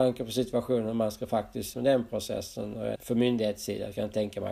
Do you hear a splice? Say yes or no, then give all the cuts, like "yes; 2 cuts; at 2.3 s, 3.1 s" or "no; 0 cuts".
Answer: yes; 2 cuts; at 1.7 s, 3.0 s